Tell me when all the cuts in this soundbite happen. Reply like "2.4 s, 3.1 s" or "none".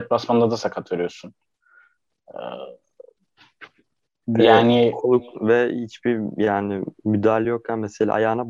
none